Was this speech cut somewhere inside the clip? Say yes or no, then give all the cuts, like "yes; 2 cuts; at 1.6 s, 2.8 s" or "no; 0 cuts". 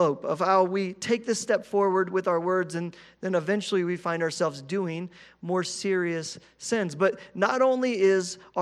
no; 0 cuts